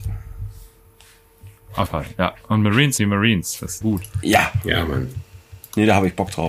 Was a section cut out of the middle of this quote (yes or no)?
yes